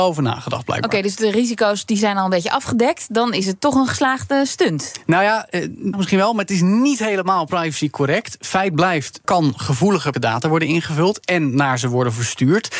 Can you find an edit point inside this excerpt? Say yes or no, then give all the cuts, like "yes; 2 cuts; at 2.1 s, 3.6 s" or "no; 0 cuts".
yes; 3 cuts; at 5.9 s, 9.2 s, 10.1 s